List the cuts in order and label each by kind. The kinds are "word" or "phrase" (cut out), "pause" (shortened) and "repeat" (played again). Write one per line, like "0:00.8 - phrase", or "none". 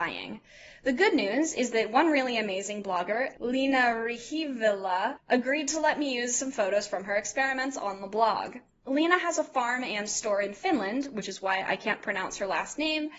none